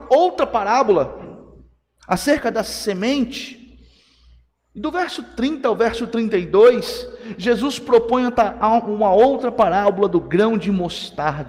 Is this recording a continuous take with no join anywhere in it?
yes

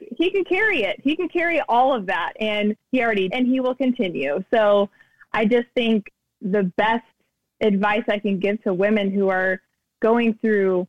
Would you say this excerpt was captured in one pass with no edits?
no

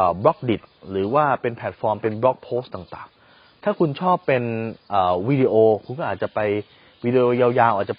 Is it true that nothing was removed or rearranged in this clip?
yes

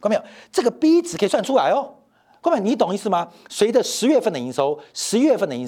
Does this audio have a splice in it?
no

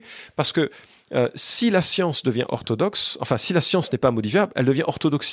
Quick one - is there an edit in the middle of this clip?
no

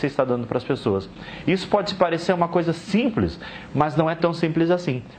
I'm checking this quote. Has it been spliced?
no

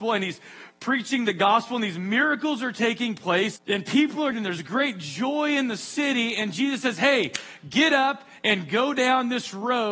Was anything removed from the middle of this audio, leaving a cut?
yes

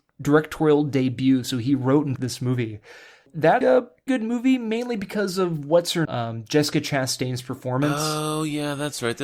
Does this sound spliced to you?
yes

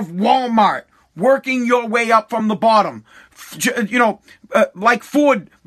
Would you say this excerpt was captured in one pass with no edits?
yes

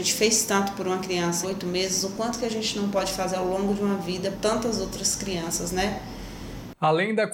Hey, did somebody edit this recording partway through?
yes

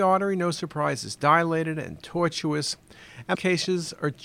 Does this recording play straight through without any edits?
no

